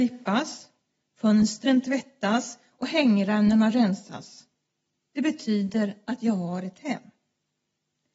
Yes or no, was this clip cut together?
no